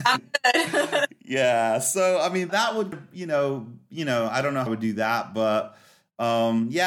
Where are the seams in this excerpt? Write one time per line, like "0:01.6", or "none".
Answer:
0:02.5
0:02.9
0:04.7